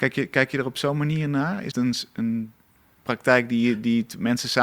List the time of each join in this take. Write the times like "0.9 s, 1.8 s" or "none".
1.7 s